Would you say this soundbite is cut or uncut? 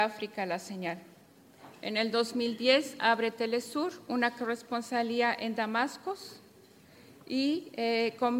uncut